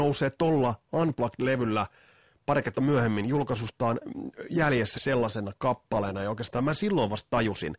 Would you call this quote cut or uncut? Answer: cut